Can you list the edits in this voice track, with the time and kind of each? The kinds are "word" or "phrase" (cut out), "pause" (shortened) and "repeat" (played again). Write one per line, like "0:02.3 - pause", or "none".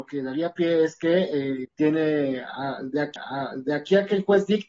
0:01.6 - word
0:03.2 - repeat

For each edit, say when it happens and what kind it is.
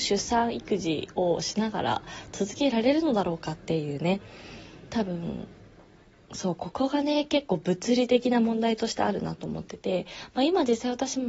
none

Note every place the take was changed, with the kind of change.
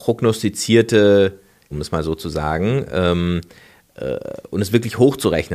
0:01.7 - word

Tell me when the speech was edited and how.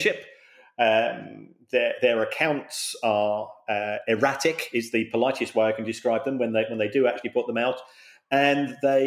none

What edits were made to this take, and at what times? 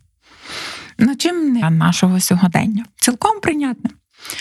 0:01.6 - phrase

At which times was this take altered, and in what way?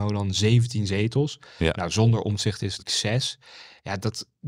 0:02.8 - word

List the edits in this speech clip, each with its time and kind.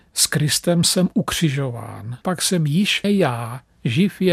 0:02.2 - word
0:03.0 - word

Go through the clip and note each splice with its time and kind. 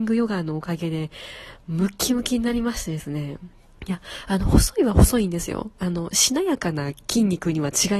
0:03.6 - pause

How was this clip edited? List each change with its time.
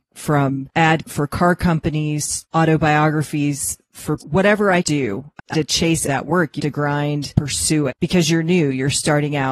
0:01.0 - word
0:02.4 - word
0:04.2 - word
0:04.8 - word
0:05.5 - word
0:06.1 - word
0:06.6 - word
0:07.3 - word
0:07.9 - word

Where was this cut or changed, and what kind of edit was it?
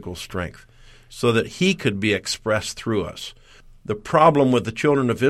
none

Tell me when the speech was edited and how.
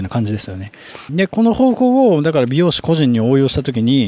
0:01.1 - phrase

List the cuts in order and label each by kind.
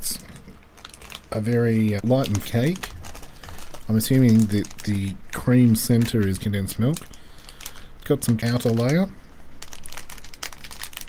0:02.0 - word
0:02.4 - word
0:06.4 - phrase
0:08.4 - phrase

